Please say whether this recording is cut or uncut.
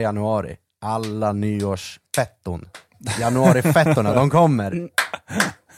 uncut